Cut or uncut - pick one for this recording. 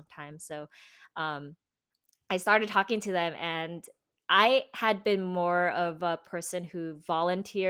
uncut